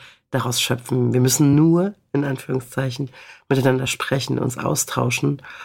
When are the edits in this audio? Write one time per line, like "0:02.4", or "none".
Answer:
none